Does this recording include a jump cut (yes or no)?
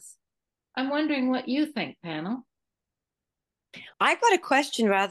yes